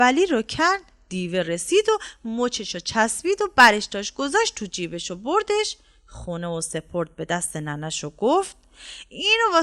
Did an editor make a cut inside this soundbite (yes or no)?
no